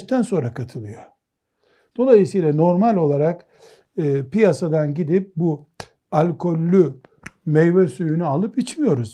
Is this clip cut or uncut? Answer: uncut